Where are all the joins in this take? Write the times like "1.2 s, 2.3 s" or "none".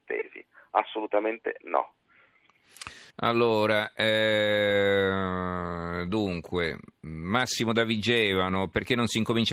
3.1 s